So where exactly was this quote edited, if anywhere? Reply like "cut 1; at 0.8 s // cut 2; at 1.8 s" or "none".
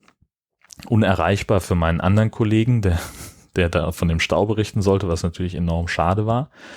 none